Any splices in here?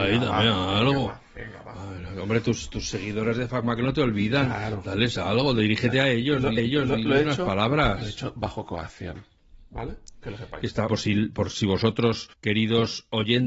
yes; 3 cuts; at 6.6 s, 10.9 s, 12.3 s

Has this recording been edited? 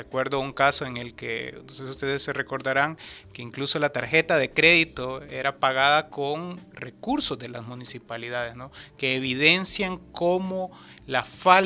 no; 0 cuts

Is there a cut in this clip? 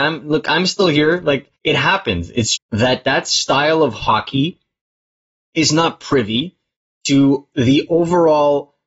yes; 2 cuts; at 1.5 s, 2.6 s

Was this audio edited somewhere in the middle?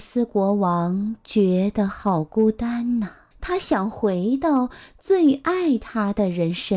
yes; 1 cut; at 3.3 s

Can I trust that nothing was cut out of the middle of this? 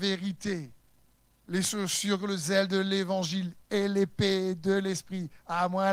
yes; 0 cuts

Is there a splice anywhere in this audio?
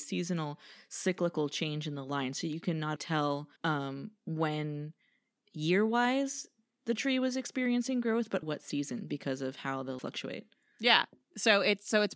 yes; 4 cuts; at 3.0 s, 3.6 s, 8.4 s, 10.0 s

